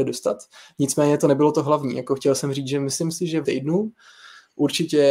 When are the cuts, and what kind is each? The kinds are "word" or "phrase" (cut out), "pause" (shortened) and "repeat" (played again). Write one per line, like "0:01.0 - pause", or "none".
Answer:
0:03.4 - word